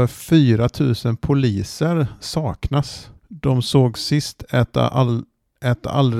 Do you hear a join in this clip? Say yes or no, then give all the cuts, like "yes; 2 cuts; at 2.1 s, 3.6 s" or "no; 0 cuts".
yes; 1 cut; at 3.2 s